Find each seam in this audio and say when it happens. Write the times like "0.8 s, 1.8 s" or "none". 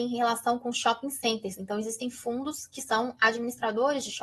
none